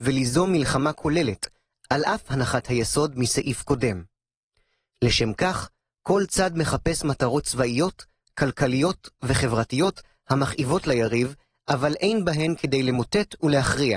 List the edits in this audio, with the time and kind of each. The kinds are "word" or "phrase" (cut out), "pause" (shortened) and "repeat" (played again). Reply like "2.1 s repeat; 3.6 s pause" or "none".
none